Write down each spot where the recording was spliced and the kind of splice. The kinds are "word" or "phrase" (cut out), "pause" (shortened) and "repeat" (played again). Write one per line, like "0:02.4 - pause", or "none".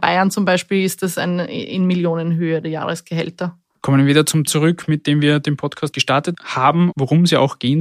0:04.5 - word
0:05.9 - word
0:06.9 - word